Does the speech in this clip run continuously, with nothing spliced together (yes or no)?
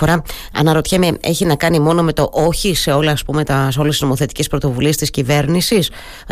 yes